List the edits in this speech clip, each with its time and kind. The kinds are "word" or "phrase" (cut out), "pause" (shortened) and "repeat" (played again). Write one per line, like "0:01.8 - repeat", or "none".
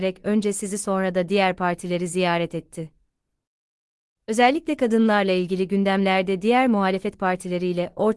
none